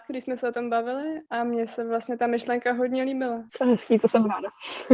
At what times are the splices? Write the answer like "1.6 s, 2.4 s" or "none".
1.3 s, 3.5 s